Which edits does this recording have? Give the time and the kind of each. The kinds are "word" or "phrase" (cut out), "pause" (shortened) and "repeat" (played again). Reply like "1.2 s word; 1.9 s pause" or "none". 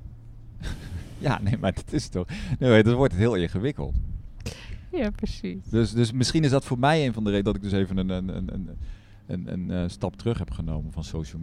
none